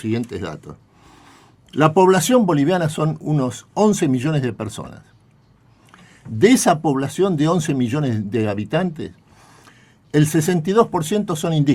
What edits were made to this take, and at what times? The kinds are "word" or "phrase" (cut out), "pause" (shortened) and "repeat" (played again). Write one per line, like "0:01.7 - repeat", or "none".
none